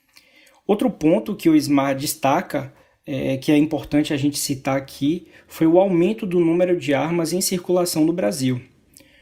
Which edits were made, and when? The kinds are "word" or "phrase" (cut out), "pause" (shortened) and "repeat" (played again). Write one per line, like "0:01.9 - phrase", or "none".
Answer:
0:02.8 - pause